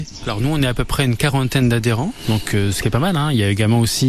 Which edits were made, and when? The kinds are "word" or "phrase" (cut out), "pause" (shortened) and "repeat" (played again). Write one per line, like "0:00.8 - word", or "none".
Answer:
none